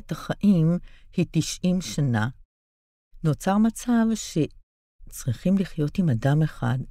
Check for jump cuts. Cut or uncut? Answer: uncut